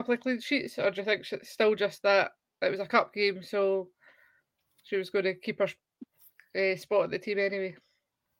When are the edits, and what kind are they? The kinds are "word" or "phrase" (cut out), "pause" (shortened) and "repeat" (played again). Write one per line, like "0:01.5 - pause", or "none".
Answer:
none